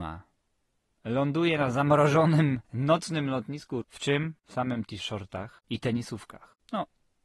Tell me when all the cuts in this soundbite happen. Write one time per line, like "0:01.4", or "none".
0:02.6
0:03.8
0:04.4
0:05.0